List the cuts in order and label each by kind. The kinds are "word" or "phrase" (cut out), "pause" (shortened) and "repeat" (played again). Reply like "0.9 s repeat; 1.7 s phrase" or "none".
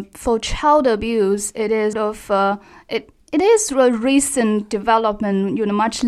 1.9 s word